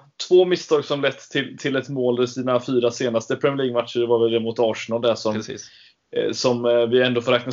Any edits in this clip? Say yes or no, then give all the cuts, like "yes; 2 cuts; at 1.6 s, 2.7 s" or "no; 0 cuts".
no; 0 cuts